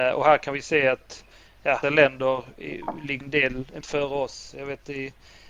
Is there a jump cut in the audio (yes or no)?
yes